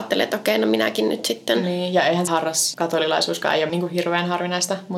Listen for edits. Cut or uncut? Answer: cut